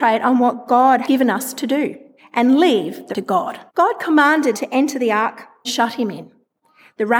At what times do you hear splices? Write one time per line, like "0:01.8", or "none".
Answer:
0:01.0
0:02.2
0:03.1
0:03.7
0:04.5
0:05.6